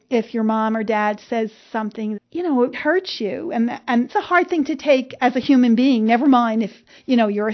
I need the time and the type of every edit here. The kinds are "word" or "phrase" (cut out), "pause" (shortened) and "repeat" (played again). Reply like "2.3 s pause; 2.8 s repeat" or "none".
2.2 s word; 2.7 s word; 4.1 s word